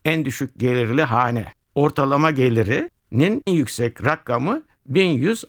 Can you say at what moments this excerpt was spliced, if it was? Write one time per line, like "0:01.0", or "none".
0:03.5

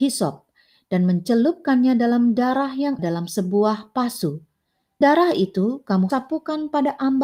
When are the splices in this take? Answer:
0:03.0
0:05.0
0:06.1

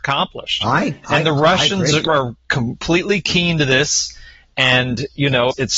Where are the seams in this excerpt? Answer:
0:01.0

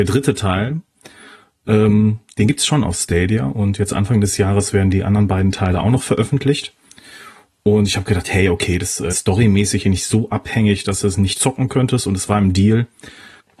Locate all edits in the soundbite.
0:09.1
0:11.3

